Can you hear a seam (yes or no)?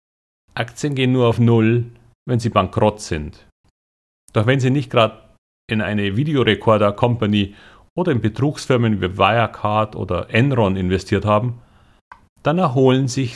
no